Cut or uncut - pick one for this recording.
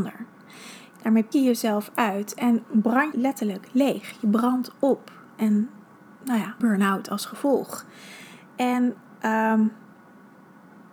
cut